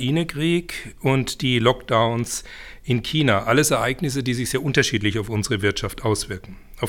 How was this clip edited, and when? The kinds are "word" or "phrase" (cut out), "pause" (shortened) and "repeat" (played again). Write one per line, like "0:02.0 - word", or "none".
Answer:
none